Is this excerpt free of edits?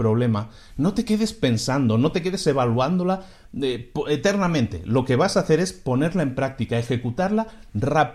yes; 0 cuts

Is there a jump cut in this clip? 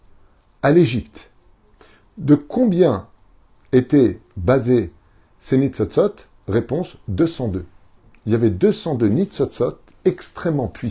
no; 0 cuts

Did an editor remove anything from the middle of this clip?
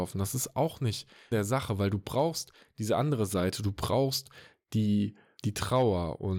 yes; 2 cuts; at 1.3 s, 5.4 s

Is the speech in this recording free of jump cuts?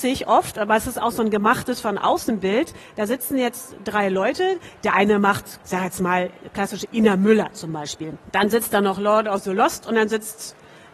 no; 1 cut; at 5.6 s

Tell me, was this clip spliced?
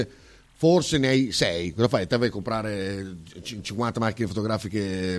no; 0 cuts

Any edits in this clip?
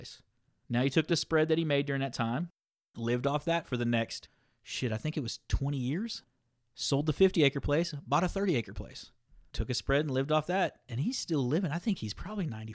no; 0 cuts

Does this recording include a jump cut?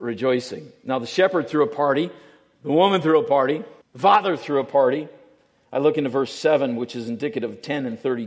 yes; 1 cut; at 3.8 s

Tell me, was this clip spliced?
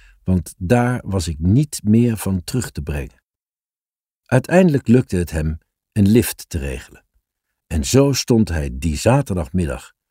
no; 0 cuts

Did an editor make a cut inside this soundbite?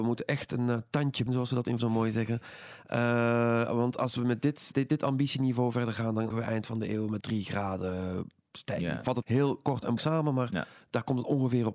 yes; 7 cuts; at 1.3 s, 1.8 s, 4.7 s, 6.3 s, 7.2 s, 9.2 s, 10.0 s

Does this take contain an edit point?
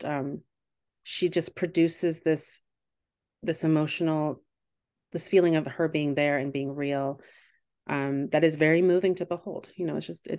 no; 0 cuts

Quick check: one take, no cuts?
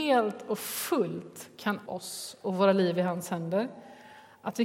no; 1 cut; at 1.9 s

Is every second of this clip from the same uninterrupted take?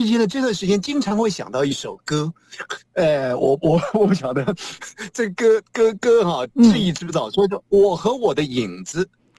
yes; 0 cuts

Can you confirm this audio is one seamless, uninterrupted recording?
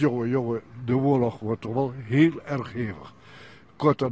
yes; 0 cuts

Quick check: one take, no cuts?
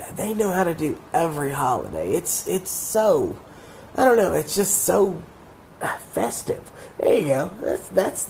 yes; 0 cuts

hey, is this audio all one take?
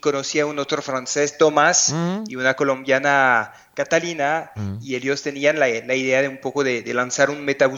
yes; 0 cuts

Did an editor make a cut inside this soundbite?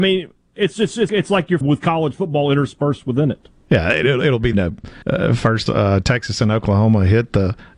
yes; 5 cuts; at 1.1 s, 1.6 s, 4.5 s, 5.0 s, 5.7 s

